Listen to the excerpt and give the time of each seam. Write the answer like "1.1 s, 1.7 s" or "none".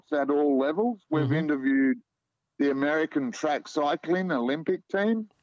none

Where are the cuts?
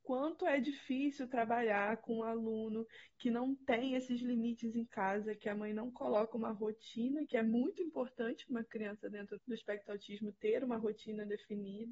9.4 s

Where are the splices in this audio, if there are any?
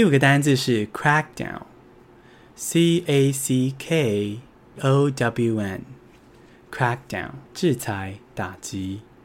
3.1 s, 4.8 s, 7.5 s

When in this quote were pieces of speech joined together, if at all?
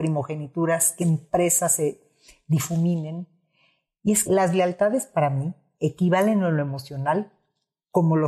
1.0 s, 4.3 s

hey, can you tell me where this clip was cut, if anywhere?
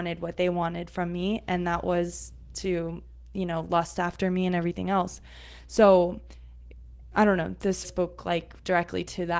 7.8 s

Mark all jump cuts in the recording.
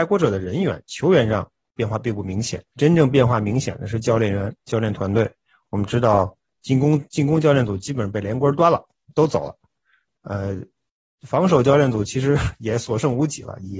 2.7 s

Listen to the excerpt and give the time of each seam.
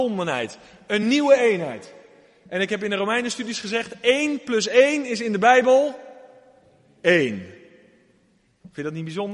none

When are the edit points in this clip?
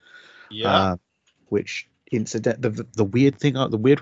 1.3 s

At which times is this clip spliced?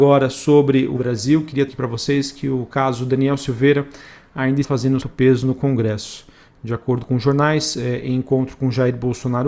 1.0 s, 1.7 s, 4.6 s, 5.0 s

